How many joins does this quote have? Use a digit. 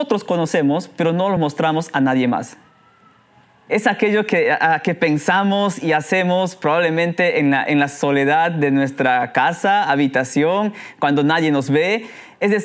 0